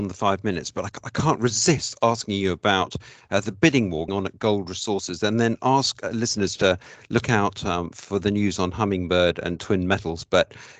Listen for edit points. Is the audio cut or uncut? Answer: cut